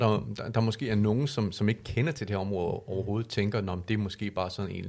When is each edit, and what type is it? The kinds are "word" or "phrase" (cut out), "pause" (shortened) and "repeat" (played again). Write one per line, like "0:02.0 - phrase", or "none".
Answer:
none